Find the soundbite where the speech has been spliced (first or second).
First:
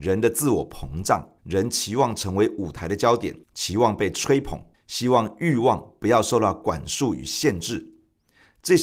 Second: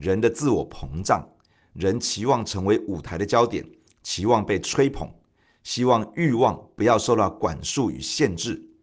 first